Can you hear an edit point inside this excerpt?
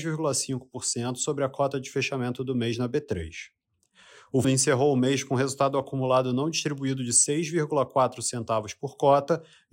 yes; 1 cut; at 4.4 s

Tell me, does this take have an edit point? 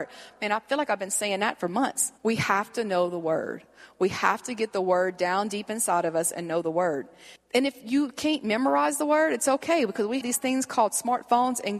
yes; 3 cuts; at 2.2 s, 7.4 s, 10.2 s

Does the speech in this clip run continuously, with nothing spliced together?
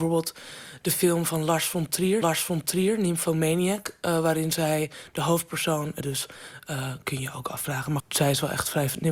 no; 3 cuts; at 2.2 s, 6.0 s, 8.0 s

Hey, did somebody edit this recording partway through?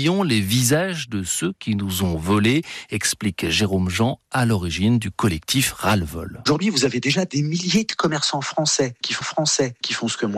yes; 1 cut; at 9.2 s

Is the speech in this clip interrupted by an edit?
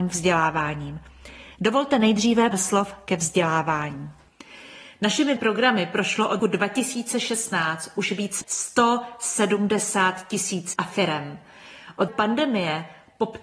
yes; 6 cuts; at 2.5 s, 5.4 s, 6.4 s, 8.4 s, 10.7 s, 12.1 s

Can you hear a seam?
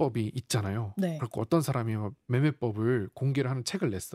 no; 0 cuts

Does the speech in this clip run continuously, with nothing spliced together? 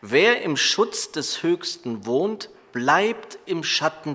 yes; 0 cuts

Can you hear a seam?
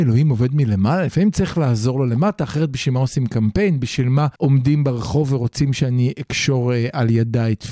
yes; 1 cut; at 4.4 s

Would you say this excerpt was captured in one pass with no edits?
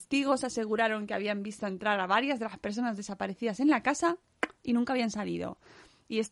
yes; 0 cuts

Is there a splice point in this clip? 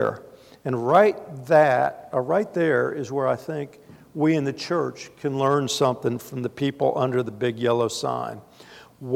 no; 0 cuts

